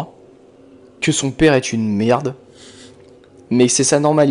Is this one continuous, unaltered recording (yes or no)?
yes